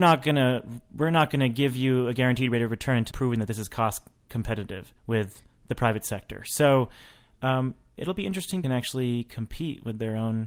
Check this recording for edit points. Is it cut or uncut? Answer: cut